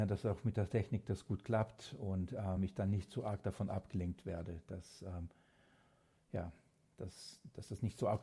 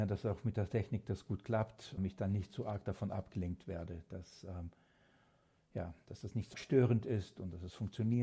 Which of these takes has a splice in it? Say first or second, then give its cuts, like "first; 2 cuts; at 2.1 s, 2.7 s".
second; 3 cuts; at 2.0 s, 6.1 s, 6.5 s